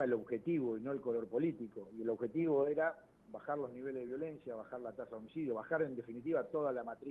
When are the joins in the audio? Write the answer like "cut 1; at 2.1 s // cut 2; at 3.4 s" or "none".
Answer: none